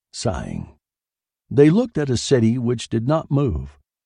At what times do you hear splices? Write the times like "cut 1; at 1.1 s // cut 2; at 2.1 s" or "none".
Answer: none